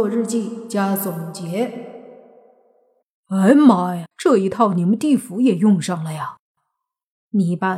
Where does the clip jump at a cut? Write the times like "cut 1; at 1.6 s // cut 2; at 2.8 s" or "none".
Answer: cut 1; at 4.1 s